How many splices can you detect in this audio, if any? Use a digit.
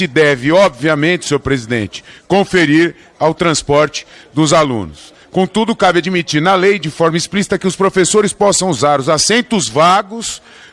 0